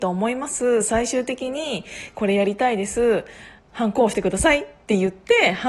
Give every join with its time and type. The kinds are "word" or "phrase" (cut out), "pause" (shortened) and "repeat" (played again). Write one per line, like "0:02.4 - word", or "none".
0:03.6 - pause